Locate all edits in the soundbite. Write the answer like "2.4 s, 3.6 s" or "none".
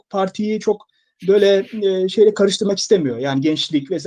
none